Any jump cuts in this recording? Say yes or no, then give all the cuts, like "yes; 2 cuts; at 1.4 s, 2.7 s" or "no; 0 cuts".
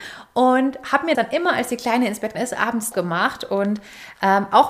yes; 3 cuts; at 1.1 s, 2.3 s, 2.9 s